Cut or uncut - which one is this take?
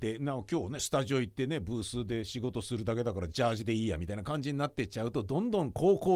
uncut